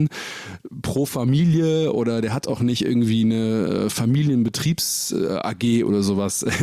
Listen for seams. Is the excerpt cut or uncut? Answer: uncut